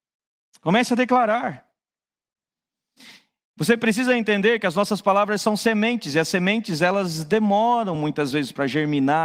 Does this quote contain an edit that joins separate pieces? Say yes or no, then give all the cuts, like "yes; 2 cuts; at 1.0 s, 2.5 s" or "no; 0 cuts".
no; 0 cuts